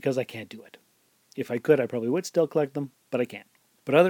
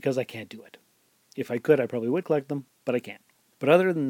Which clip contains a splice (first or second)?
second